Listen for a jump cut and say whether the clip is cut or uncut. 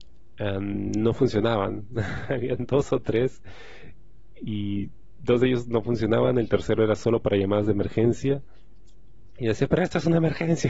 uncut